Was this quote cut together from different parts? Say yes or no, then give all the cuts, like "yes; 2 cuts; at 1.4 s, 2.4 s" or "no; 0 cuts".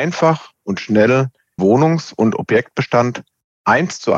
yes; 1 cut; at 1.6 s